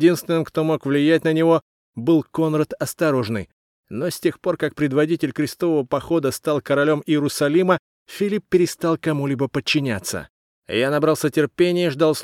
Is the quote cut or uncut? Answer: uncut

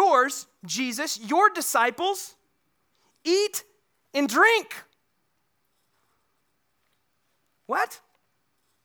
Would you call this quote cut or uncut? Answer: uncut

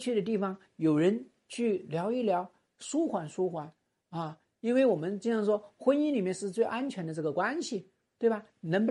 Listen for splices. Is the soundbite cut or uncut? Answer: uncut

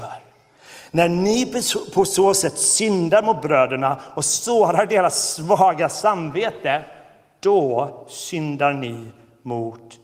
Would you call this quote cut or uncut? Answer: uncut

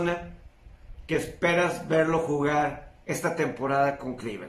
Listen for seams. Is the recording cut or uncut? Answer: cut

